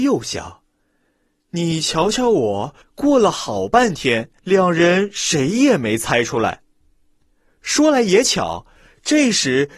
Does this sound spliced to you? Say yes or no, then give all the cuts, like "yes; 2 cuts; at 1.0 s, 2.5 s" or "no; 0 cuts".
yes; 2 cuts; at 2.8 s, 4.4 s